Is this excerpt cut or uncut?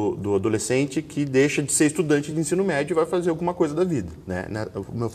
uncut